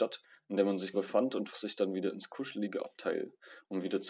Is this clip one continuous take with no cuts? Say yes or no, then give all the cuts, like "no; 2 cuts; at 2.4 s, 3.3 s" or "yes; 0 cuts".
no; 2 cuts; at 0.9 s, 1.5 s